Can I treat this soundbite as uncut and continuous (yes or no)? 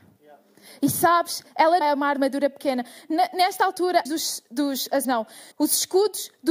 no